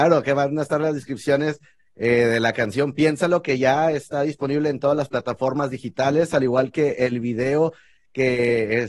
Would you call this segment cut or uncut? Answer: uncut